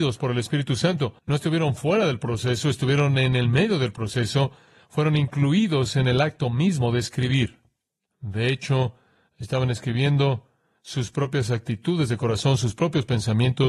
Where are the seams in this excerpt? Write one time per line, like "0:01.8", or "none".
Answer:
0:01.2
0:08.0